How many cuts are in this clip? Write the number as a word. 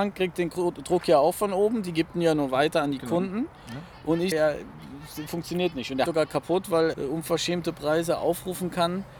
three